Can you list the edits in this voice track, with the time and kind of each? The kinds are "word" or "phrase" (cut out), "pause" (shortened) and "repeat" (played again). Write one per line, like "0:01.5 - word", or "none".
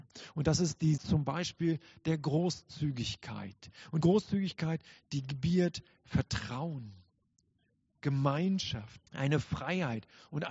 0:01.0 - word
0:04.0 - word
0:09.1 - pause